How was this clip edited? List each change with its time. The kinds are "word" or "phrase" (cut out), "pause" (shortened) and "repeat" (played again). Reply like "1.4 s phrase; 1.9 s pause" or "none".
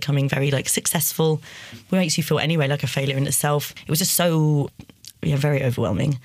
5.1 s pause